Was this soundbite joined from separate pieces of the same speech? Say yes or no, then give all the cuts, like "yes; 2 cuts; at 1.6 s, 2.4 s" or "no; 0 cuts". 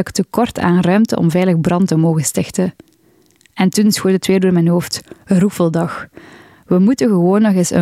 no; 0 cuts